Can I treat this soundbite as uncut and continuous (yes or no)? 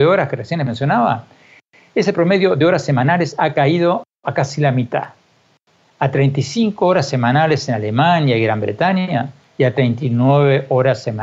yes